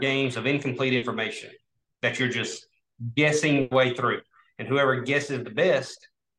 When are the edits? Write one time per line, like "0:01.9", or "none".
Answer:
none